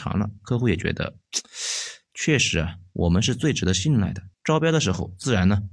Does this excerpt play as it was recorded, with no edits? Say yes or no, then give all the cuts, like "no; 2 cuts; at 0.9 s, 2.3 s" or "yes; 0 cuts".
no; 1 cut; at 4.3 s